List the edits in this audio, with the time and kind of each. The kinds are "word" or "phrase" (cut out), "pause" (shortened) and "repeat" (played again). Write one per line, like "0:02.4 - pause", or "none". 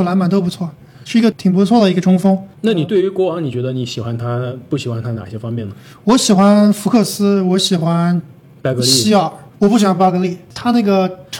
0:09.5 - pause